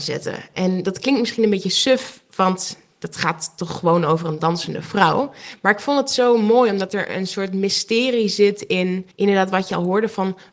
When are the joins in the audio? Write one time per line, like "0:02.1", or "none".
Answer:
0:09.1